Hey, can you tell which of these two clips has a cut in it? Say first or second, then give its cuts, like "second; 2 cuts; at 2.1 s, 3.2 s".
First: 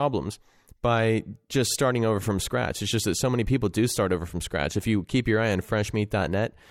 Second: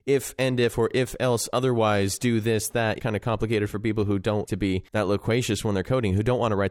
second; 3 cuts; at 3.0 s, 4.4 s, 4.9 s